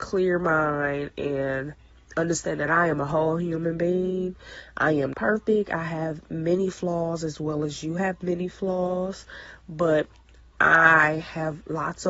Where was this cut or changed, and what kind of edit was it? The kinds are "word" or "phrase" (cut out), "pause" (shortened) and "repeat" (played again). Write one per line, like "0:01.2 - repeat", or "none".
0:05.1 - word